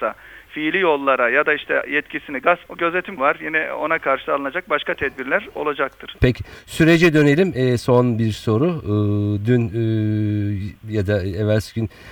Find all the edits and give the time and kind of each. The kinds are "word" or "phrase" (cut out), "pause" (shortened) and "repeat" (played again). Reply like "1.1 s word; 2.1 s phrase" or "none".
2.7 s word; 3.2 s word